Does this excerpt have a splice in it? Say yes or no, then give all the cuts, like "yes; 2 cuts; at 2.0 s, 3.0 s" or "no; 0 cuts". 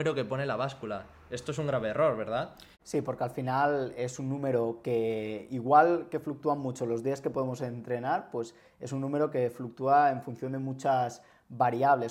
yes; 1 cut; at 2.7 s